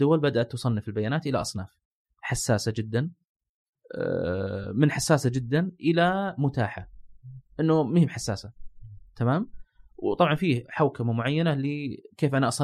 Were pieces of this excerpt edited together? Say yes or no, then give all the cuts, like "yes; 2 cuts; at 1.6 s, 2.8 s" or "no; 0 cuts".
no; 0 cuts